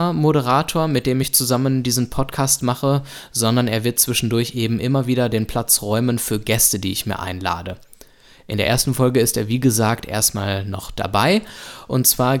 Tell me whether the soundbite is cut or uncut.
uncut